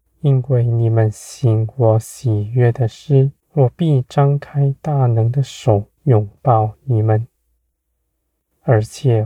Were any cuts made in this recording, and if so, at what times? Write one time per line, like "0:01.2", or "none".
0:03.4
0:06.0